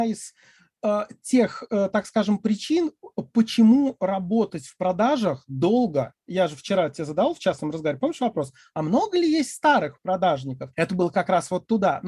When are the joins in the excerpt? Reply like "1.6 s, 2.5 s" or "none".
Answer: 10.7 s